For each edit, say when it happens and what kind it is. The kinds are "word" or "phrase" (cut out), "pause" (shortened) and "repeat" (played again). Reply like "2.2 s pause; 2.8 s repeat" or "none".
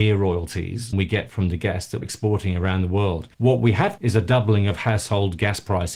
0.9 s word; 2.0 s word; 3.3 s pause; 4.0 s word